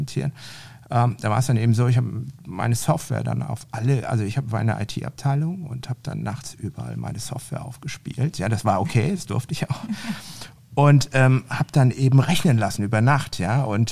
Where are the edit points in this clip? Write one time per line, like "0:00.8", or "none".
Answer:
none